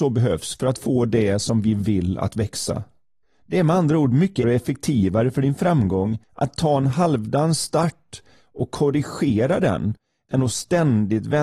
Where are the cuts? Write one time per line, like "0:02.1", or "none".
0:03.2
0:04.4
0:06.2